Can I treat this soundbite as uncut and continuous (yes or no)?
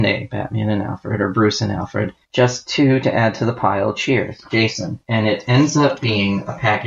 no